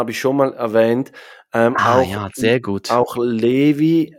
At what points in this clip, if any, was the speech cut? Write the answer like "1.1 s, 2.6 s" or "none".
none